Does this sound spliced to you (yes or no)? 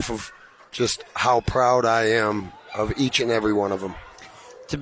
no